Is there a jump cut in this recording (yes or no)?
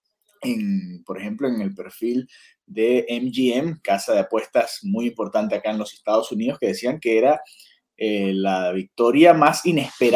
no